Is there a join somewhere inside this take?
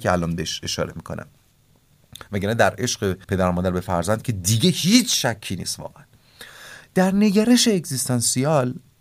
yes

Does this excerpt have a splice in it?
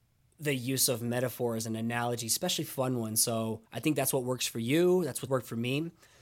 yes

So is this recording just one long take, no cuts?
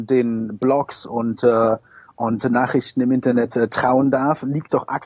yes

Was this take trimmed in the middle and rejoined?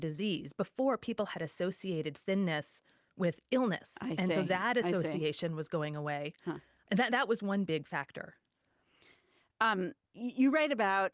no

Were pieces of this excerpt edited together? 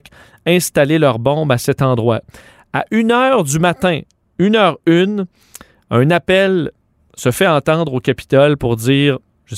no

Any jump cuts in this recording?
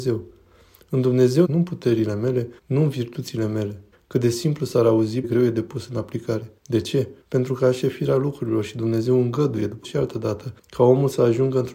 yes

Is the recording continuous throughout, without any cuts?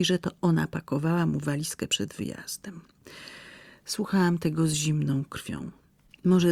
yes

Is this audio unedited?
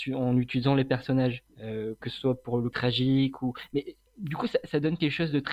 no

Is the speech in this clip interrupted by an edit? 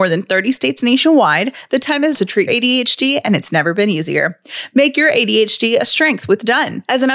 yes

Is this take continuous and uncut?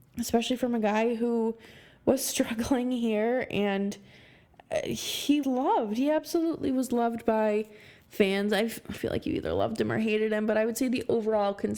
no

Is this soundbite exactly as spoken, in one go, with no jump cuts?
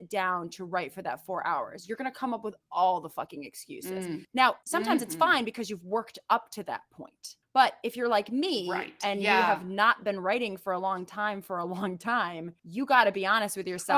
yes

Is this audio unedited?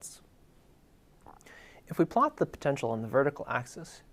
yes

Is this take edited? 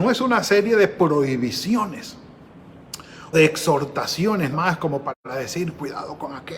yes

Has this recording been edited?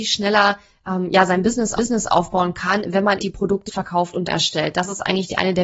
yes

